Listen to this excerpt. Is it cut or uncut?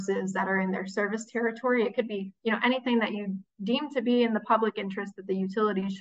uncut